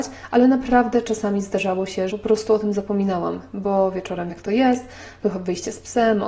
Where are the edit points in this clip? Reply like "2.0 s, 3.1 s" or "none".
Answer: 2.1 s, 4.3 s